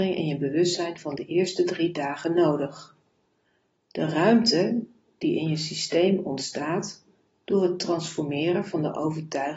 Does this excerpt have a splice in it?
no; 0 cuts

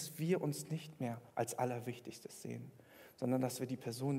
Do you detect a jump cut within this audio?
yes; 1 cut; at 1.3 s

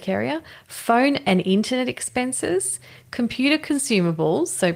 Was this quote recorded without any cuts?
yes; 0 cuts

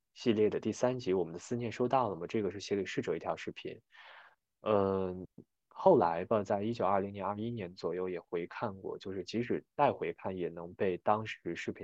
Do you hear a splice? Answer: no; 0 cuts

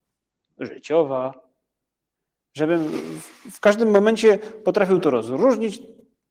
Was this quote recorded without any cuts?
yes; 0 cuts

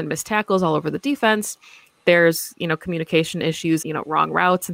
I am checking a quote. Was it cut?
yes; 1 cut; at 3.8 s

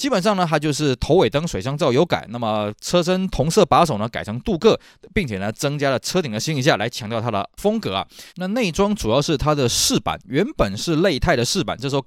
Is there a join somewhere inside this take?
yes; 2 cuts; at 7.6 s, 8.3 s

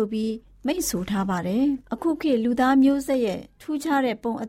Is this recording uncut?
yes; 0 cuts

